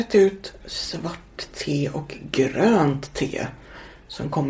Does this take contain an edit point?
no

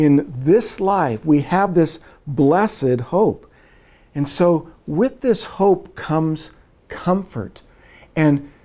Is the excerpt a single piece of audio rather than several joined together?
yes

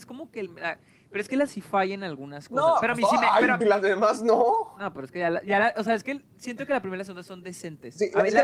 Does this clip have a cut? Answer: yes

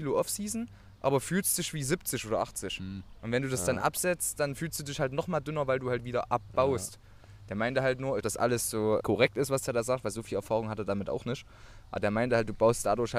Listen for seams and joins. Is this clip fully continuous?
no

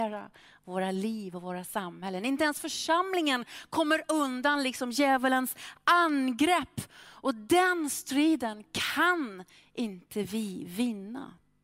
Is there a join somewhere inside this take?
no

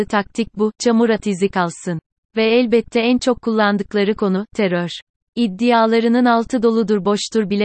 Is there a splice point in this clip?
no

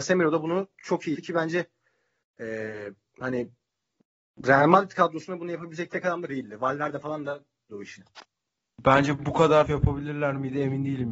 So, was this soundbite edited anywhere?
yes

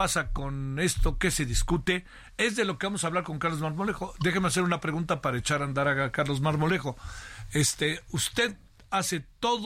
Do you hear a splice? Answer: no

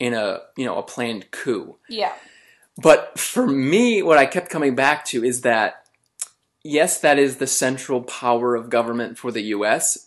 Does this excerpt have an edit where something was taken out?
no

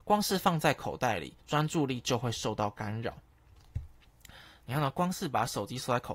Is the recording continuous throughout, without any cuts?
no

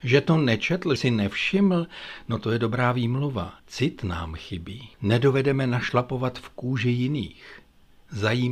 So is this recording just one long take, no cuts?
no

